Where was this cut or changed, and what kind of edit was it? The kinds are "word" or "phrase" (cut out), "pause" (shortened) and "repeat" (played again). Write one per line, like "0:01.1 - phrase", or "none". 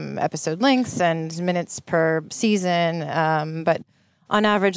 none